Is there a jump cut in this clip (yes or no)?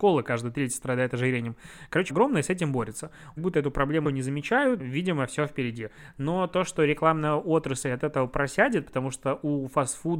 yes